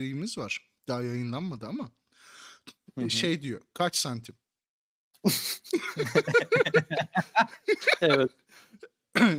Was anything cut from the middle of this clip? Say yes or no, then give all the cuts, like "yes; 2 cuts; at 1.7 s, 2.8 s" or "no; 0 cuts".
no; 0 cuts